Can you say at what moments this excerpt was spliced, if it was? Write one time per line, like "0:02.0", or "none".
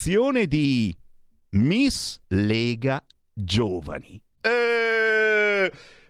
0:02.2
0:04.3